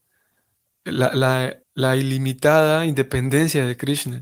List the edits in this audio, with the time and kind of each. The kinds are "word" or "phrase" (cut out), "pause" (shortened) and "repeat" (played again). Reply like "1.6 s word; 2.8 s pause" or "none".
1.6 s pause